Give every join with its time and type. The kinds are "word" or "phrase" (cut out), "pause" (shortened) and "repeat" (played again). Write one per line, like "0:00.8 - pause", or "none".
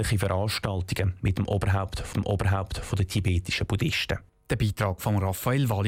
0:02.1 - repeat

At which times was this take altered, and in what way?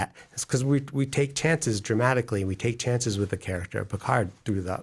none

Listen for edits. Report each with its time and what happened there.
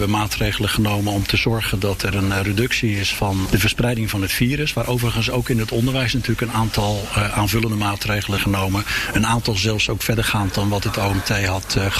0:03.5 - word
0:08.4 - word

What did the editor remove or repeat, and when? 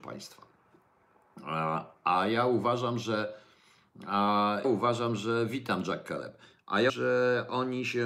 0:04.6 - word
0:06.9 - word

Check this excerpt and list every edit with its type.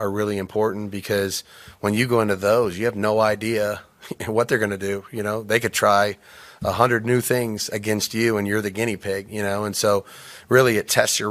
none

